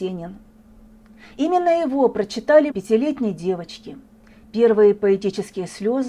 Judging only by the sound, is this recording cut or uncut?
cut